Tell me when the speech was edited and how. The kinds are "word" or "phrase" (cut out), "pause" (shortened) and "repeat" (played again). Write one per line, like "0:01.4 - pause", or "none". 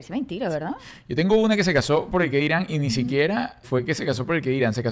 0:03.6 - word